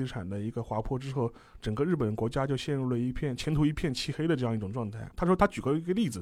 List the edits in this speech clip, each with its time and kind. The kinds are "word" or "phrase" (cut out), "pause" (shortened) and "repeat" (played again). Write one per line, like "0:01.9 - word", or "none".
0:05.1 - pause